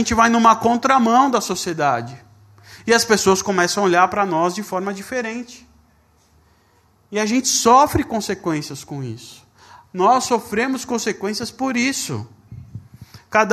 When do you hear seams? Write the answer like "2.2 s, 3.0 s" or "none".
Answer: none